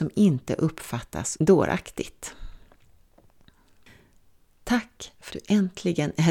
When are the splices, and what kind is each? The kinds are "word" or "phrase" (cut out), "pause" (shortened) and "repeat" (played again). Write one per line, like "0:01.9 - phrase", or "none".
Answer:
0:01.4 - word
0:05.3 - word